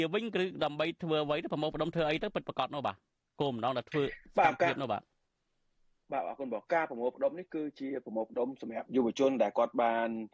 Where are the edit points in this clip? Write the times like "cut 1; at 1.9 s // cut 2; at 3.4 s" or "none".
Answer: cut 1; at 6.7 s